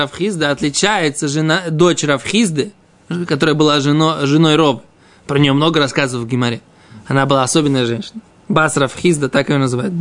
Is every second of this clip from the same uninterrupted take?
yes; 0 cuts

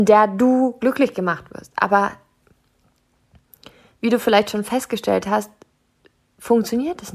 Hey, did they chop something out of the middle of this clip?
no; 0 cuts

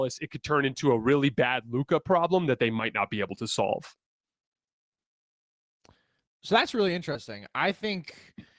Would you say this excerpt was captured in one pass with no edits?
yes; 0 cuts

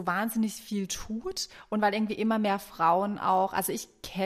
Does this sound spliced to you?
no; 0 cuts

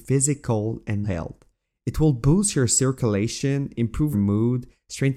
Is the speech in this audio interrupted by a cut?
yes; 2 cuts; at 1.0 s, 4.1 s

